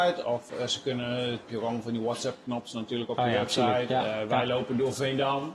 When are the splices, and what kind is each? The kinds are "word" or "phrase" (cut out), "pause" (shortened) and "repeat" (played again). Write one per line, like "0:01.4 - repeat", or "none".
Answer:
0:01.4 - word